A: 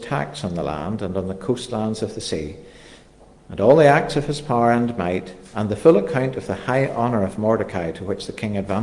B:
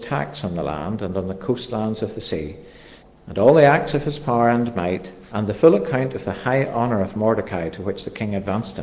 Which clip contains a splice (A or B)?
B